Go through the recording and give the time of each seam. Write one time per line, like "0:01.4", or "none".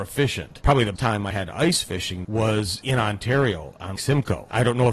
0:01.0
0:01.3
0:02.2
0:04.0

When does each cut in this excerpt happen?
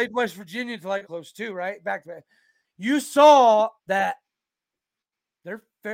0:01.0
0:02.0
0:03.8

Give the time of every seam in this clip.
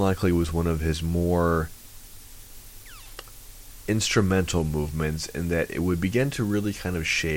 none

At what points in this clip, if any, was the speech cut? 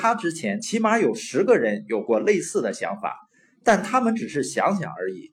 none

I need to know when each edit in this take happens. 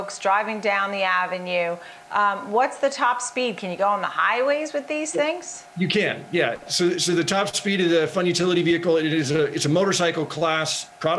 0:05.7

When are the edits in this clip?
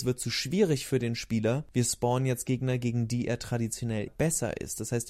0:04.1

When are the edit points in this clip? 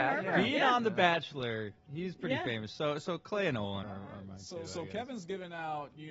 0:03.8

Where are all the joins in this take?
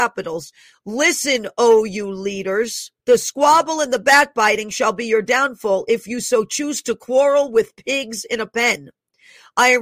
0:03.0

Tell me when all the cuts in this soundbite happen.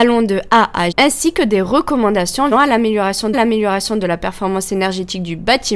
0:00.9
0:02.5
0:03.3

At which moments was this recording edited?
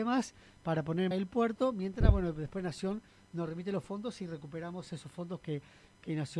0:01.1

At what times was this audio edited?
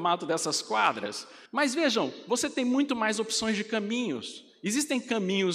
0:01.5

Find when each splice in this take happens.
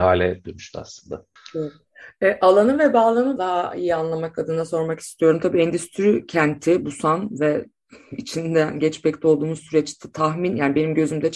0:01.4
0:03.4

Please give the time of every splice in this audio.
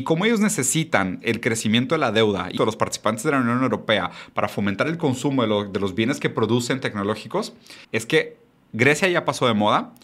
0:02.6
0:07.8

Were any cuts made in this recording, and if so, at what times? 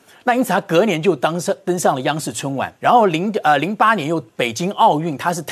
0:02.8
0:04.3

